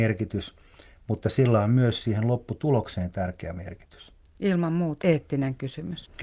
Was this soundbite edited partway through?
yes; 1 cut; at 5.0 s

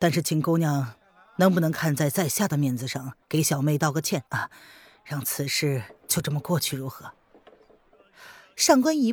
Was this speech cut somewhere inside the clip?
yes; 2 cuts; at 3.2 s, 4.3 s

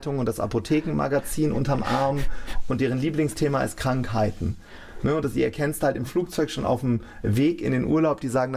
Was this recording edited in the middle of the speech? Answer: no; 0 cuts

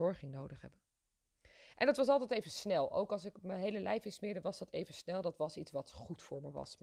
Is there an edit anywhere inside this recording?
no; 0 cuts

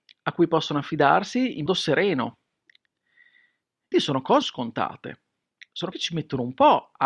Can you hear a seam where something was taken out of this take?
yes; 4 cuts; at 1.7 s, 3.9 s, 4.4 s, 5.9 s

